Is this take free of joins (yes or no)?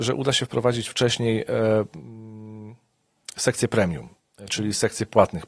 yes